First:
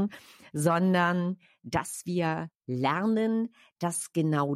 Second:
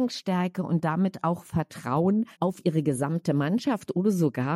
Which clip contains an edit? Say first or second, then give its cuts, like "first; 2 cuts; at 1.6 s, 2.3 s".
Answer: second; 1 cut; at 2.3 s